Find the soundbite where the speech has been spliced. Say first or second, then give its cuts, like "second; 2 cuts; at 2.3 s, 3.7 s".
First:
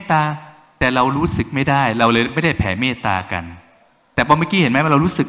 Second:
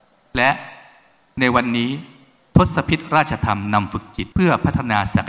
second; 1 cut; at 4.3 s